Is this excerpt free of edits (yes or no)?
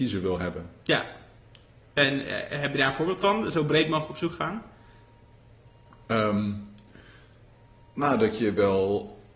yes